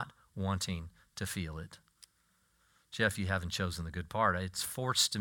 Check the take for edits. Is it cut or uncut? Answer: uncut